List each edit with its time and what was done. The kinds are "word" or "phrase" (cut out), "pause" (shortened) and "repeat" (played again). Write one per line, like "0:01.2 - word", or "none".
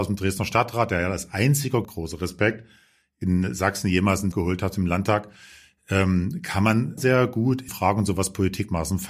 0:01.8 - word
0:04.3 - word
0:07.0 - word
0:07.7 - word